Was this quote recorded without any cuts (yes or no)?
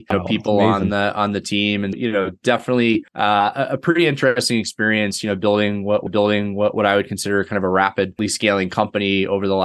no